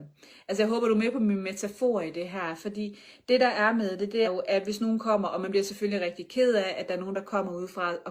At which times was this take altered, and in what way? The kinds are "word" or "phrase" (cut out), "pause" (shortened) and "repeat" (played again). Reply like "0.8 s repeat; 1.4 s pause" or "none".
4.2 s word